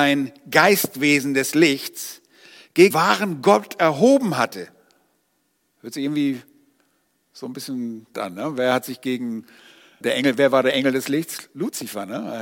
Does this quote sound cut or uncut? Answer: cut